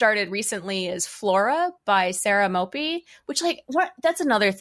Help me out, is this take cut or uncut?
uncut